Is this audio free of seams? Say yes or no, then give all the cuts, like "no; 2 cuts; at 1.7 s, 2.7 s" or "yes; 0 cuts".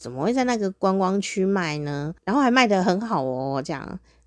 no; 1 cut; at 2.2 s